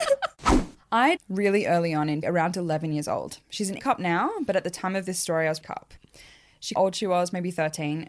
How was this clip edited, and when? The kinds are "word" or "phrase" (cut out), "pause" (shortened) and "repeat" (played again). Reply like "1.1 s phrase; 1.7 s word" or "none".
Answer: 1.2 s phrase; 2.2 s word; 3.8 s word; 5.6 s phrase; 6.8 s phrase